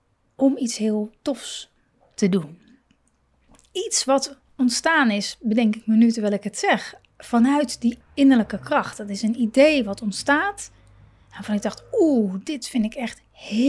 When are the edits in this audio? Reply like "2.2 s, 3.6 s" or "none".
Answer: 8.0 s